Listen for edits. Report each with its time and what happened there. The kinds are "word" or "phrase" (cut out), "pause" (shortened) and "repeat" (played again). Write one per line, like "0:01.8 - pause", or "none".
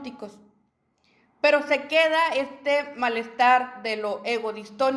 none